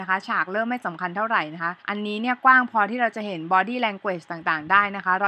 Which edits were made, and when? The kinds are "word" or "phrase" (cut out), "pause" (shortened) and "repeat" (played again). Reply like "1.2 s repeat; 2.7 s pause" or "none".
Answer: 1.8 s pause